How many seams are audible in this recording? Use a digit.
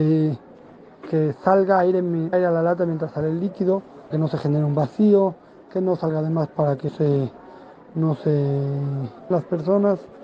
4